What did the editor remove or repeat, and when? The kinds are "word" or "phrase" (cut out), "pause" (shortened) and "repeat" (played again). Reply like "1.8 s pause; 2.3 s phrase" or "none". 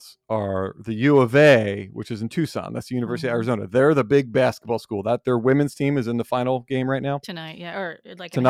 none